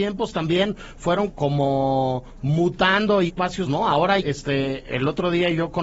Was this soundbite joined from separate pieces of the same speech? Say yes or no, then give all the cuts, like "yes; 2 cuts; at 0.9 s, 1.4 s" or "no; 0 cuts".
yes; 4 cuts; at 1.3 s, 3.3 s, 3.6 s, 4.2 s